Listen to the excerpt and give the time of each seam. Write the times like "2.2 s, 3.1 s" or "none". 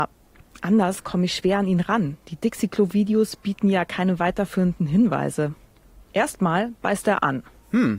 6.1 s

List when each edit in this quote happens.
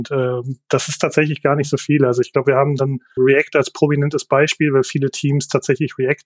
3.2 s

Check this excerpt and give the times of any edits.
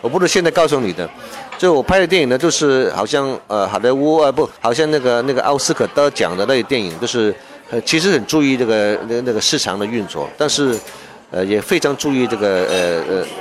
4.6 s

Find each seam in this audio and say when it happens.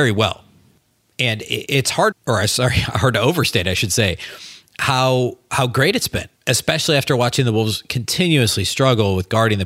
2.1 s, 6.4 s

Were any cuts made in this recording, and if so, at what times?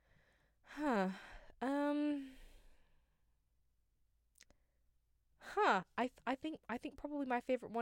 none

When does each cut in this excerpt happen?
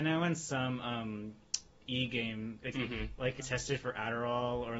2.7 s, 3.4 s

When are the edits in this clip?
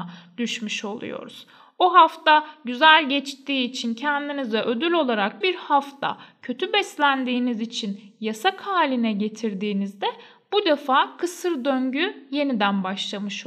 5.4 s

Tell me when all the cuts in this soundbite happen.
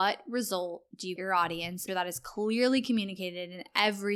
1.2 s, 1.9 s

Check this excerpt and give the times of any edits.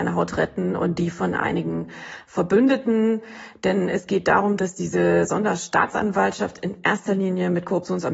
none

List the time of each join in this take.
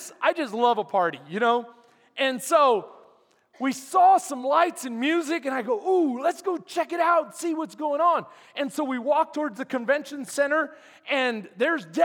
none

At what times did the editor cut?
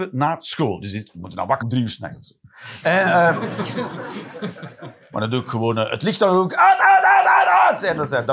1.6 s

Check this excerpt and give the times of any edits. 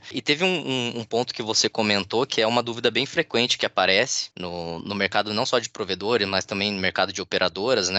none

